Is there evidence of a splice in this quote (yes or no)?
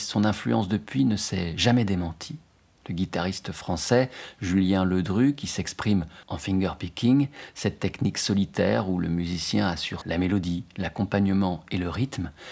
yes